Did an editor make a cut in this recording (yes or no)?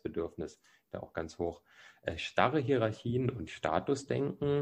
no